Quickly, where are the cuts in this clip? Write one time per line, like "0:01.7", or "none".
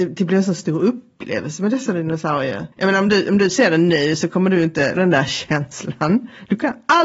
0:02.7
0:05.0